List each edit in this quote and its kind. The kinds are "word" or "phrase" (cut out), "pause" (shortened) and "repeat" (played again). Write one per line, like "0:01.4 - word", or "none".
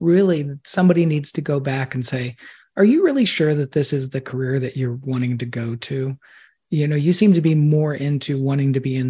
none

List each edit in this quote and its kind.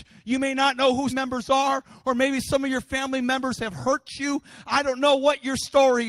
0:01.1 - phrase

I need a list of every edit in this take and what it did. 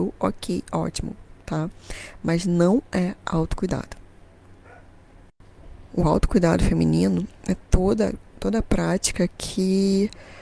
none

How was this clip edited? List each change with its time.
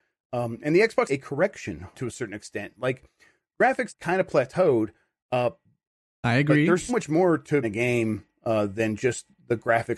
0:01.1 - phrase
0:01.9 - word
0:03.9 - word
0:06.9 - word
0:07.6 - phrase

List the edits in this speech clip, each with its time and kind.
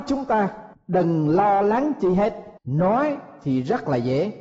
0:02.6 - pause

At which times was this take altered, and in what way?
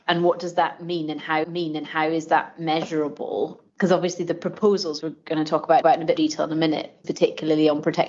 0:01.4 - repeat
0:03.7 - pause
0:05.0 - word
0:05.8 - repeat
0:06.2 - word
0:07.0 - word

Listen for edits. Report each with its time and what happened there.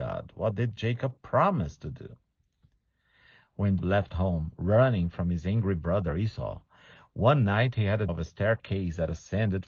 0:03.8 - word
0:08.1 - word

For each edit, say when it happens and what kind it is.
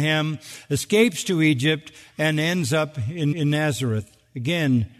0:03.3 - repeat

